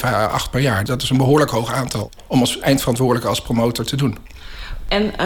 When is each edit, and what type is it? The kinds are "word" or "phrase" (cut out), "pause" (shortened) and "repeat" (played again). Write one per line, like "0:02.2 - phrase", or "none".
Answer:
none